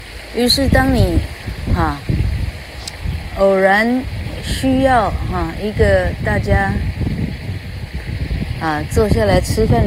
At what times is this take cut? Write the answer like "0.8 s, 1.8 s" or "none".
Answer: none